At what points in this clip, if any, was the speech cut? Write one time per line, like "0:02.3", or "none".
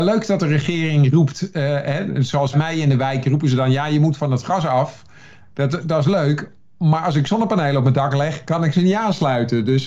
0:02.5

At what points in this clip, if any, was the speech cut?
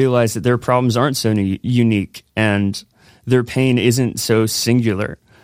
none

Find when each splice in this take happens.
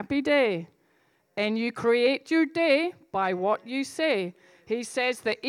none

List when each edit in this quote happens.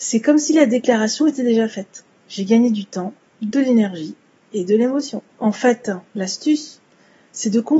0:05.3

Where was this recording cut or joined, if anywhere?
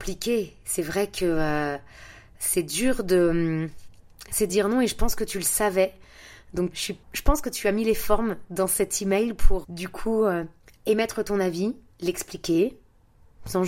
0:04.5
0:06.7
0:07.0
0:09.6
0:10.6
0:11.9

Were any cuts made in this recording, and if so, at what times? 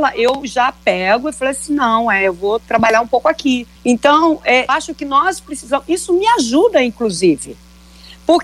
0:03.8
0:04.7

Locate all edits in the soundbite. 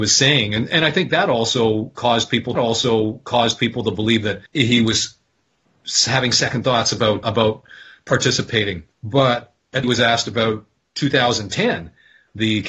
0:02.5
0:04.5
0:07.2
0:08.9
0:09.8

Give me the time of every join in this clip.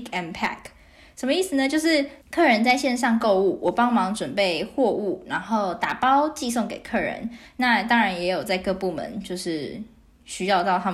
0:02.2

